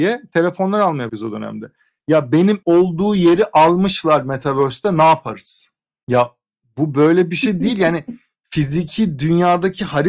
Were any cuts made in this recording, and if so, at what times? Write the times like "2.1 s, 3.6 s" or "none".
1.1 s, 2.6 s